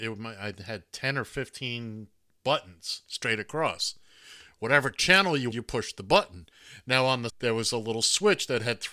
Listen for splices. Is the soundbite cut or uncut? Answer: cut